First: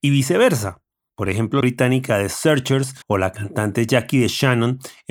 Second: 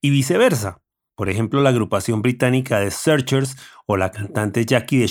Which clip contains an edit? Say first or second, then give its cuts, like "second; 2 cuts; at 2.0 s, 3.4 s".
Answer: first; 2 cuts; at 1.6 s, 3.0 s